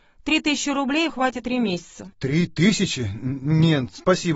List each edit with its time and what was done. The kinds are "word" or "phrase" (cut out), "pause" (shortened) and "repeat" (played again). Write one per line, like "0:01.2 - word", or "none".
0:01.1 - word
0:01.4 - word